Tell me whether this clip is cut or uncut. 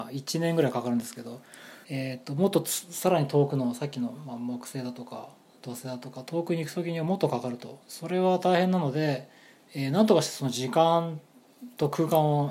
cut